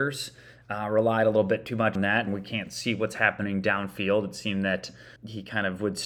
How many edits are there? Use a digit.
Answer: 3